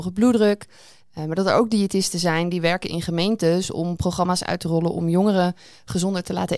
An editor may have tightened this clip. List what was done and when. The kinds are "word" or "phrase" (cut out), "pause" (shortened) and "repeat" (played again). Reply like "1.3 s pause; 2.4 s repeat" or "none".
none

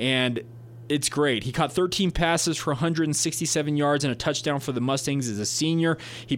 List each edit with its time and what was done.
none

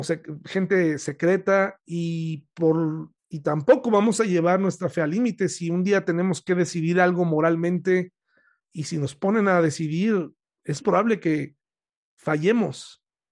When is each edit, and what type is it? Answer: 3.2 s pause; 8.6 s word; 10.8 s word

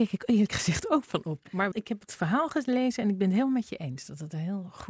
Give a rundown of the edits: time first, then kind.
1.7 s word

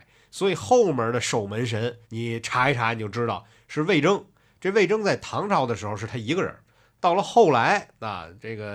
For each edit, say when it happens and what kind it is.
2.0 s pause

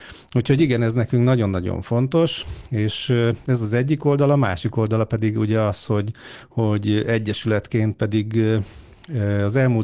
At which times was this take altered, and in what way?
none

